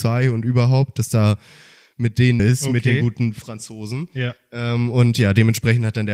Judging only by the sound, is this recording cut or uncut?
cut